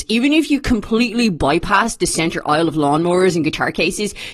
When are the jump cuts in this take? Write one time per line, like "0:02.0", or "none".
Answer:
none